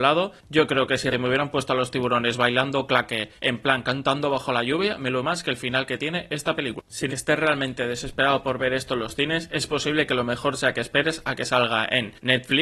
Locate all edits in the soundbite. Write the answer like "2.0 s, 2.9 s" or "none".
1.1 s, 3.4 s, 5.2 s, 7.1 s